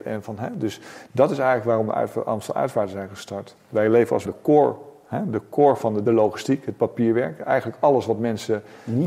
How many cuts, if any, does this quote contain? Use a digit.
2